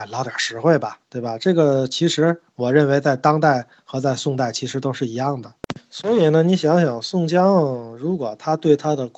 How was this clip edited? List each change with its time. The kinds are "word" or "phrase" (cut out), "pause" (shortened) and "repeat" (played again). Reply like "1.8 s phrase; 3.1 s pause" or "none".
1.0 s pause